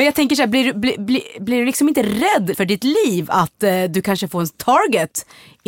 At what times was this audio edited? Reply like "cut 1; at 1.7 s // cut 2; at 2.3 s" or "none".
cut 1; at 2.5 s